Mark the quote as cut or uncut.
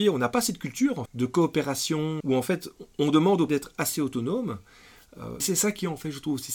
cut